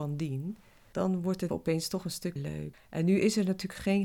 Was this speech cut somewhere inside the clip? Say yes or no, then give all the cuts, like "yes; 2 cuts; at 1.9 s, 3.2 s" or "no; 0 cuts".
yes; 2 cuts; at 1.5 s, 2.4 s